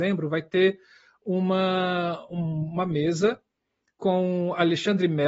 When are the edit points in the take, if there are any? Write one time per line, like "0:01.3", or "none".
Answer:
none